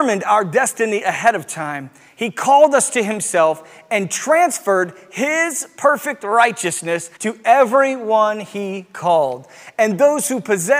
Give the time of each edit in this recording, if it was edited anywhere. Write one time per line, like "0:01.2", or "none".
0:07.2